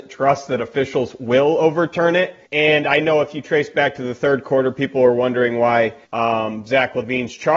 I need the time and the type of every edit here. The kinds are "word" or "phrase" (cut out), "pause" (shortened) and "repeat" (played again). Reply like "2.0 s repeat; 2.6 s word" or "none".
2.4 s pause; 6.0 s pause